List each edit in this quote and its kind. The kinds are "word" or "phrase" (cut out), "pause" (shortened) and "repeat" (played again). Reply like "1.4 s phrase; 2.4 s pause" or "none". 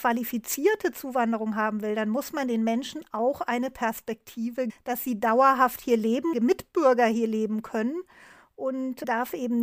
4.7 s word; 6.3 s phrase